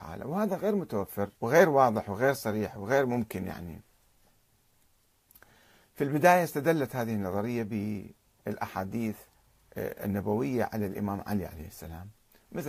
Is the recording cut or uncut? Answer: cut